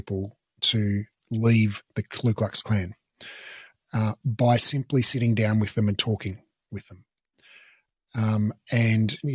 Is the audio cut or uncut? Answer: uncut